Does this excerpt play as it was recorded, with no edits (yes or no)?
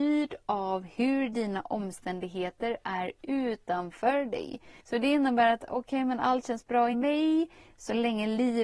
no